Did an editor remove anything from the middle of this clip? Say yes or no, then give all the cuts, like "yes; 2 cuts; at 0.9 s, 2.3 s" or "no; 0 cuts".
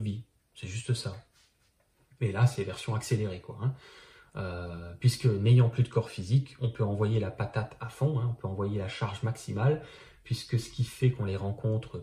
no; 0 cuts